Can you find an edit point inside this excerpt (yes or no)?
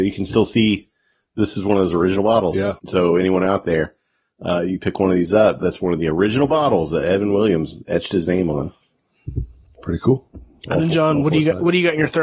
yes